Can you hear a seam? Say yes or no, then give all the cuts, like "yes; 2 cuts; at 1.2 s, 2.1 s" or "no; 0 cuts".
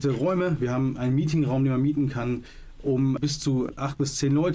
no; 0 cuts